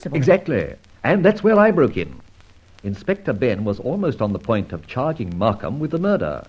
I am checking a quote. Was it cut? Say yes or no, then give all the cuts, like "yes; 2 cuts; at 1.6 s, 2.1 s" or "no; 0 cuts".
no; 0 cuts